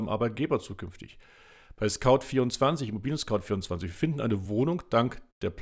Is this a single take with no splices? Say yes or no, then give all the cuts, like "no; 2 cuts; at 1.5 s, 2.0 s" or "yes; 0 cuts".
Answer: yes; 0 cuts